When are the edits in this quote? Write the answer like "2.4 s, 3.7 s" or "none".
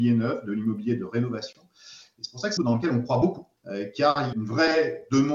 2.6 s, 3.6 s, 4.3 s